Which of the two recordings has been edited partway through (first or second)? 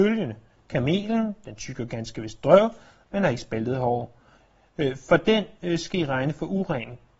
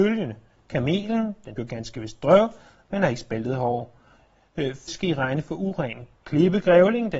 second